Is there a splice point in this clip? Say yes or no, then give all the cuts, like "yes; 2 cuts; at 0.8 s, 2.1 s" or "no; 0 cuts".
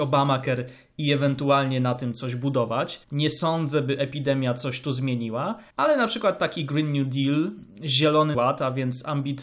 yes; 3 cuts; at 3.0 s, 5.7 s, 8.3 s